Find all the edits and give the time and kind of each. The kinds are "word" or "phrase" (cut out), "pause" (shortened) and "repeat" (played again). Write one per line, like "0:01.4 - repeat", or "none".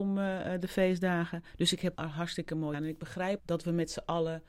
0:01.9 - word
0:02.7 - word
0:03.4 - word